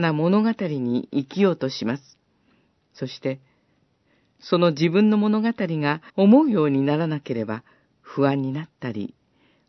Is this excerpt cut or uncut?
cut